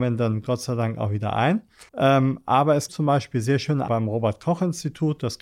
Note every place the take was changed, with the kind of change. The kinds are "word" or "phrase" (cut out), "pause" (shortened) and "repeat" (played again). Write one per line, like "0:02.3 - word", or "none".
0:01.9 - pause
0:02.9 - word
0:03.9 - word